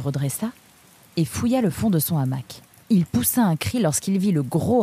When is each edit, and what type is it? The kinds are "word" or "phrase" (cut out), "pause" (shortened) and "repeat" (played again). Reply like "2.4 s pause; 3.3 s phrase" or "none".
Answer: 2.7 s pause

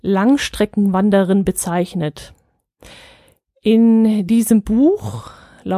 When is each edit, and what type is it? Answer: none

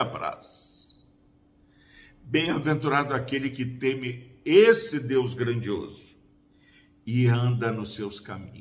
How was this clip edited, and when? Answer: none

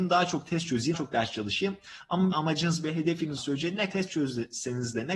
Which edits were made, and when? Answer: 0.9 s word; 2.3 s word; 3.4 s word; 3.9 s word

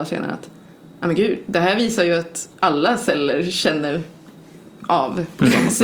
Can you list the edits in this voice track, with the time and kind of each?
2.6 s pause

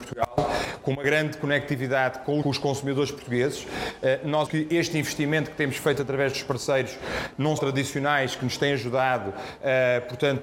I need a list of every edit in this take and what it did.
2.4 s word; 4.5 s word; 7.6 s word

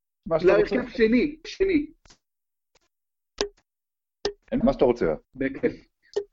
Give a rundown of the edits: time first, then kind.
1.4 s word; 4.6 s word; 5.2 s pause

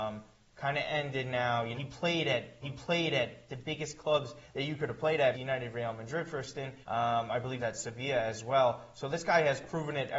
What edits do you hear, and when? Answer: 1.7 s word; 2.6 s repeat; 5.3 s word; 6.8 s pause; 7.6 s phrase

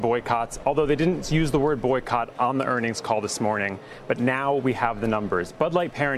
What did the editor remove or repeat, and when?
none

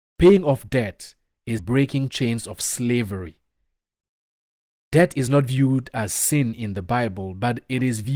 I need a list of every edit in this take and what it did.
1.6 s word

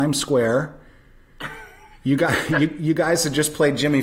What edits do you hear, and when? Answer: none

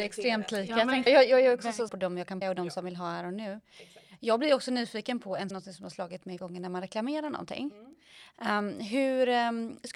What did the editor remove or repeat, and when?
1.1 s word; 1.9 s phrase; 2.4 s word; 5.5 s phrase; 6.4 s word

